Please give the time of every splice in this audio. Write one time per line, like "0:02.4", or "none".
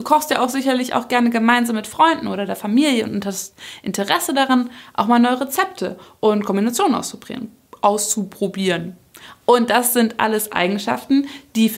none